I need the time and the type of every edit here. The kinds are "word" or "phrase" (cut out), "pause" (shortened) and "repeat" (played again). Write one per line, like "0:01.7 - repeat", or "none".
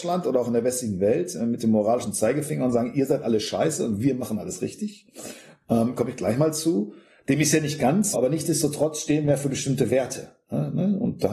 0:08.1 - word